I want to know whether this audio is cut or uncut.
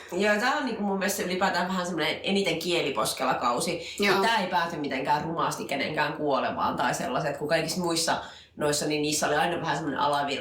uncut